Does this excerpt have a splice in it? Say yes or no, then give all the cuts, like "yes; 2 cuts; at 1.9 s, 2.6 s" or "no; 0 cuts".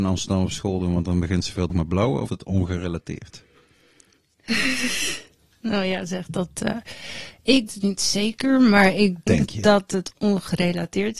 yes; 4 cuts; at 1.7 s, 2.3 s, 7.7 s, 9.3 s